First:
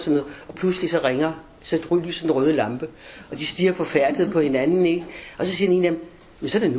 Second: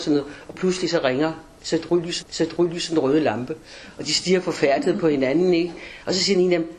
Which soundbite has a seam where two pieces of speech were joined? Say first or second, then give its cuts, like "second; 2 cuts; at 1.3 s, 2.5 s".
second; 1 cut; at 2.2 s